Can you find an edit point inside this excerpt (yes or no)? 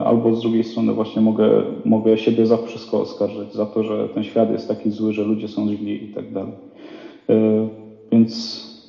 no